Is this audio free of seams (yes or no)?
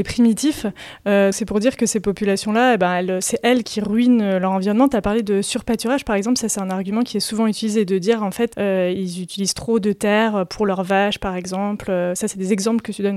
no